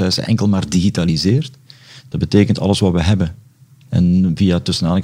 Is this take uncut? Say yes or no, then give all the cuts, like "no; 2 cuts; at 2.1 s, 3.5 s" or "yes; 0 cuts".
yes; 0 cuts